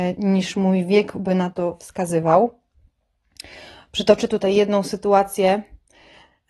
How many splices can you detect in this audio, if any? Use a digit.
0